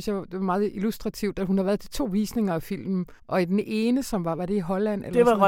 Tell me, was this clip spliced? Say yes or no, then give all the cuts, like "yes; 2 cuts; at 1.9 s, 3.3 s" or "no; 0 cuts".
yes; 1 cut; at 3.2 s